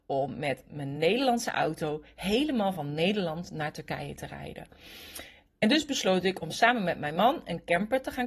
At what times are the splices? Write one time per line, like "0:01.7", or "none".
none